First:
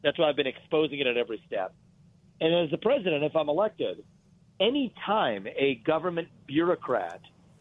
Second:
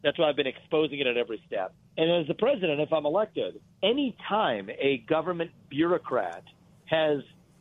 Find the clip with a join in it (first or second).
second